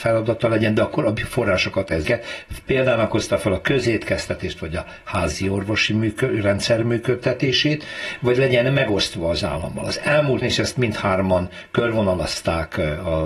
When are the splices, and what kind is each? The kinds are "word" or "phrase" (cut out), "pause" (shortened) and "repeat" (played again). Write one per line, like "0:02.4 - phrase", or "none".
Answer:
0:02.0 - word
0:10.4 - word